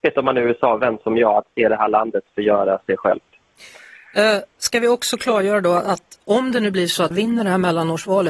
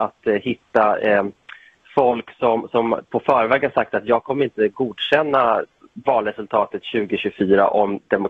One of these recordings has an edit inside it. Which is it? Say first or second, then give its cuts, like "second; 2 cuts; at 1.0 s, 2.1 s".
first; 1 cut; at 7.1 s